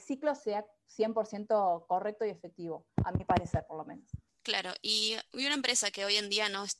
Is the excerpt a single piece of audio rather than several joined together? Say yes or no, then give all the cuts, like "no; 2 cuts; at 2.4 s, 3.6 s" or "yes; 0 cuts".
no; 1 cut; at 4.3 s